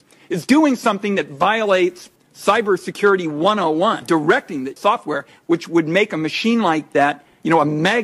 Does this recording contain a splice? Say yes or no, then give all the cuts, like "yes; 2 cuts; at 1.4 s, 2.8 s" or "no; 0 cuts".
yes; 1 cut; at 4.8 s